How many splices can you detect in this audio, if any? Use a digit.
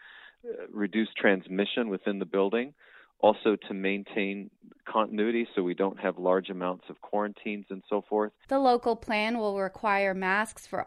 0